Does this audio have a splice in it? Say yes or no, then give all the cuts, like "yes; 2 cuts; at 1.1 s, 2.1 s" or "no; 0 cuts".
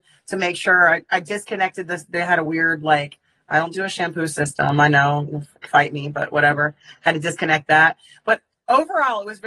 no; 0 cuts